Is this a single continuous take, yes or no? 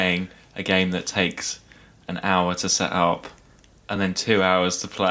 yes